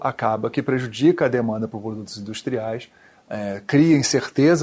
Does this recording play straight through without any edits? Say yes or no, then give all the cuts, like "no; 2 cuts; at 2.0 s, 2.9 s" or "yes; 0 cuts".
yes; 0 cuts